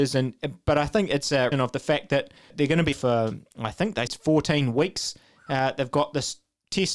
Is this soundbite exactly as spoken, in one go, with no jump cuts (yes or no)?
no